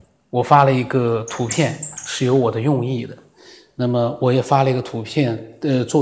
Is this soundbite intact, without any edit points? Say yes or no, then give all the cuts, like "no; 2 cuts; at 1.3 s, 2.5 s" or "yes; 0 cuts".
yes; 0 cuts